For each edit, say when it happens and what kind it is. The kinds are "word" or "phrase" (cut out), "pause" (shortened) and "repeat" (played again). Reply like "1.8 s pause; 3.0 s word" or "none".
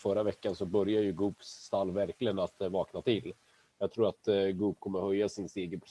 none